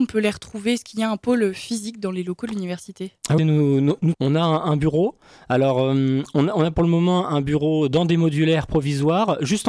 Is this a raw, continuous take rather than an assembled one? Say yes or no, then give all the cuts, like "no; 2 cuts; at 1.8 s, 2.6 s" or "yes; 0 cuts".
no; 2 cuts; at 3.4 s, 4.1 s